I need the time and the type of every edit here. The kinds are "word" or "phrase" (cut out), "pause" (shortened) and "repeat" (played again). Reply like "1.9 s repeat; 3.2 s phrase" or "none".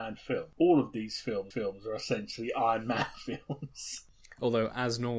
1.5 s repeat